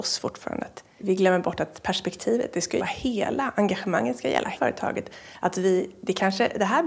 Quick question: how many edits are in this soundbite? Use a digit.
3